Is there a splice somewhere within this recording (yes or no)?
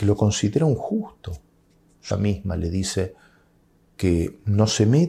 yes